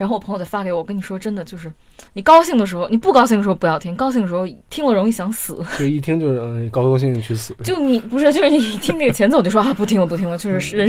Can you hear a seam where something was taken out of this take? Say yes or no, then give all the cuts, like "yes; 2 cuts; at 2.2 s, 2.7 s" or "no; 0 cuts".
yes; 2 cuts; at 2.1 s, 4.6 s